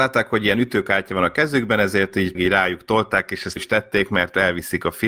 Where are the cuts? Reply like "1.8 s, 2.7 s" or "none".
2.3 s, 3.6 s